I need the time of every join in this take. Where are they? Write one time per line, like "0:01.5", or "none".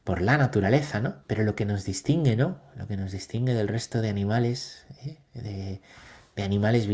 0:01.2